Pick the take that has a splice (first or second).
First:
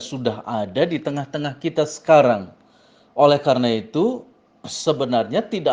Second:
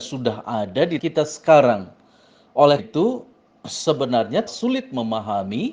second